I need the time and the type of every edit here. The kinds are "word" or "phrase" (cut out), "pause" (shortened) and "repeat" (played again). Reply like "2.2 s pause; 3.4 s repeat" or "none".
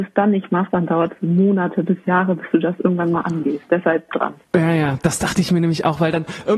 4.1 s word; 4.4 s pause

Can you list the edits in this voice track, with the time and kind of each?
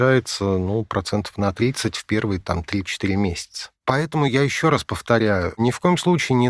none

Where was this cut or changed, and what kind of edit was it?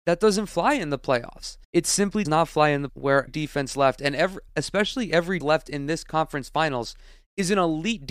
1.6 s pause; 2.3 s word; 2.9 s word; 3.3 s word; 4.5 s pause; 5.4 s word

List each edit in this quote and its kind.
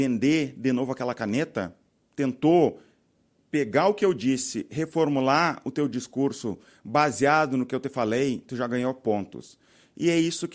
none

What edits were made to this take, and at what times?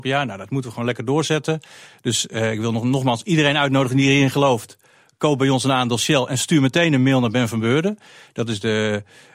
none

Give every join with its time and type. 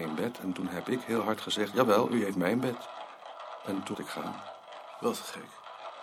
3.9 s word

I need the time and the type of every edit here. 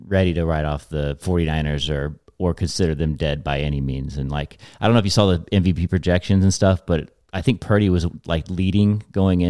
none

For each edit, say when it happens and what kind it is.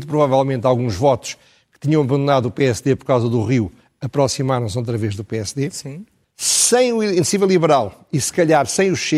6.2 s pause

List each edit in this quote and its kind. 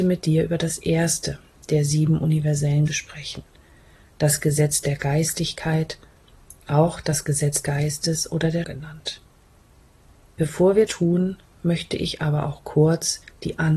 2.9 s word; 7.6 s word; 8.6 s word; 10.9 s word

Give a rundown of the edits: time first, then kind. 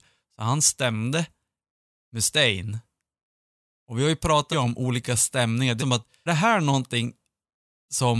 4.5 s word; 5.8 s word; 6.3 s word

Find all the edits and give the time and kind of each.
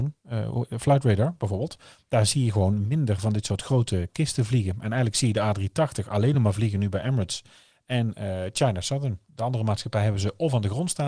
none

